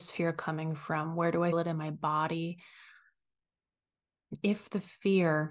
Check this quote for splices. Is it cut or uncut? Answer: cut